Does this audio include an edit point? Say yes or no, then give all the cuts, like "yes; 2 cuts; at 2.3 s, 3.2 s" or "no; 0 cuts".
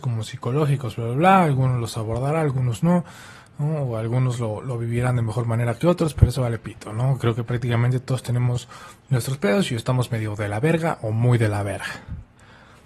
no; 0 cuts